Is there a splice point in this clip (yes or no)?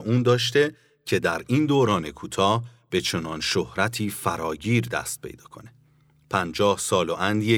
no